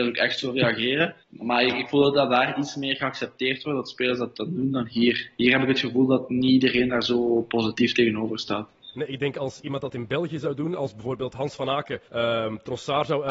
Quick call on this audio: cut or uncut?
cut